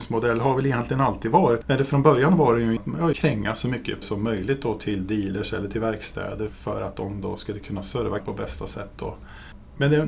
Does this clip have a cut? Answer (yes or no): yes